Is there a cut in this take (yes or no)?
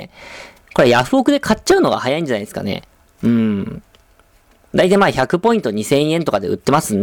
yes